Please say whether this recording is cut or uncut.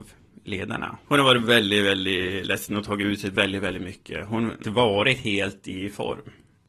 cut